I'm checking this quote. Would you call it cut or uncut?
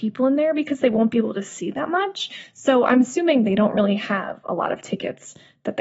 uncut